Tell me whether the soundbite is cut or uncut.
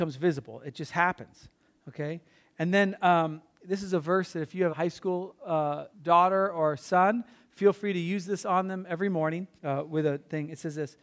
cut